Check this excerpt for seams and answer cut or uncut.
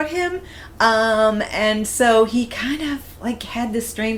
uncut